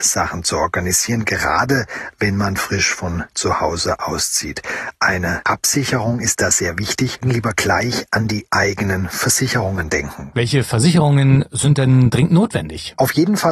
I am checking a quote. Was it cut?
yes; 2 cuts; at 7.2 s, 8.5 s

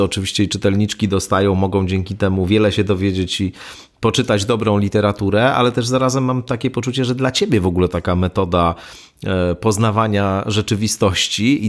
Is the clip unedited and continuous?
no; 1 cut; at 7.9 s

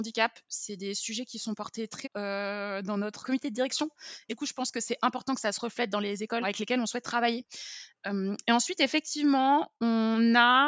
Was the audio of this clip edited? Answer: yes; 4 cuts; at 2.0 s, 3.2 s, 4.3 s, 6.4 s

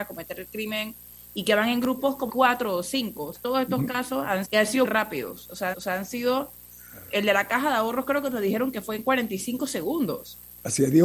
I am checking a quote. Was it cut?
yes; 5 cuts; at 2.3 s, 3.3 s, 4.4 s, 4.8 s, 5.7 s

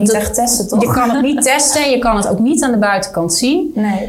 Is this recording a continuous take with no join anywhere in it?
yes; 0 cuts

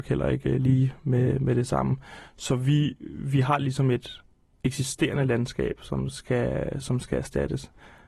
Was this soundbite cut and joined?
no; 0 cuts

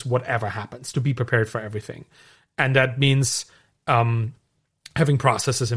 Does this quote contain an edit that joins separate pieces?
no; 0 cuts

